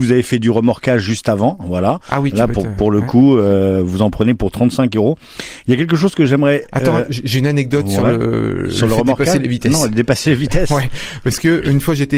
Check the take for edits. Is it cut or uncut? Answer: uncut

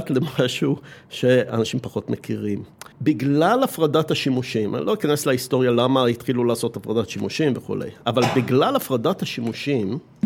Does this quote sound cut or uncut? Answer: cut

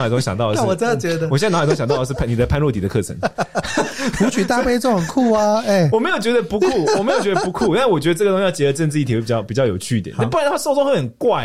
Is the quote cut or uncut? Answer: cut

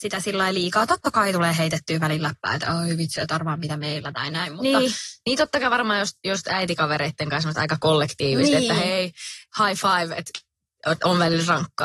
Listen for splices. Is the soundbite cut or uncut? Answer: uncut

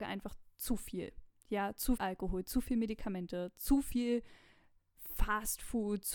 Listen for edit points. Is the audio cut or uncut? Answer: cut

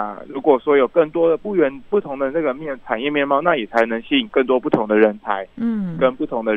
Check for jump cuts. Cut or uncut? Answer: uncut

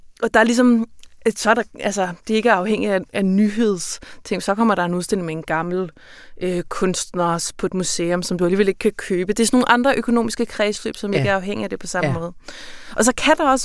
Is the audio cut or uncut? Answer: uncut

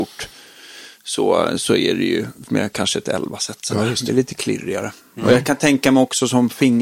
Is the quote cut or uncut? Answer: cut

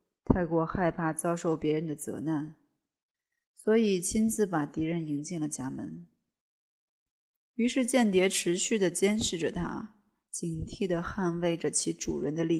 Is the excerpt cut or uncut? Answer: uncut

